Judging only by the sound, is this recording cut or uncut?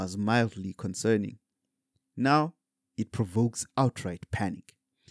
uncut